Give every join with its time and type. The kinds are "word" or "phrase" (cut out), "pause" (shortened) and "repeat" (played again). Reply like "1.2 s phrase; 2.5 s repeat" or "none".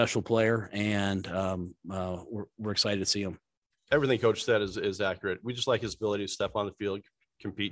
none